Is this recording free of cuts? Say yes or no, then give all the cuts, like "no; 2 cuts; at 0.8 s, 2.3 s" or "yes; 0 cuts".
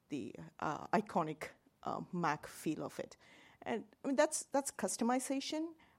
yes; 0 cuts